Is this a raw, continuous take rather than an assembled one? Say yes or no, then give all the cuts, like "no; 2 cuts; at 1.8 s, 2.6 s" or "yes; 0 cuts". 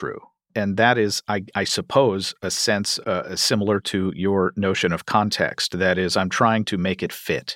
no; 1 cut; at 3.0 s